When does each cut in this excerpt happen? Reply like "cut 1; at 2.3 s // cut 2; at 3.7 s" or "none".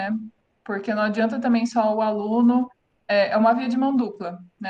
none